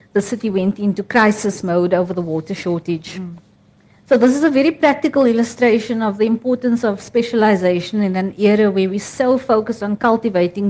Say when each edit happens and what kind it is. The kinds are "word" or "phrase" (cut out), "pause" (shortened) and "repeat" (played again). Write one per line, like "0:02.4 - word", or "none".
none